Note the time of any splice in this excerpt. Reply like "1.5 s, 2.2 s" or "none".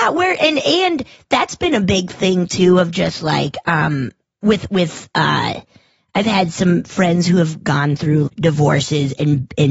8.3 s